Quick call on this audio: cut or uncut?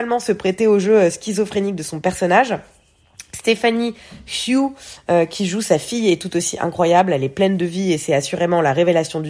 uncut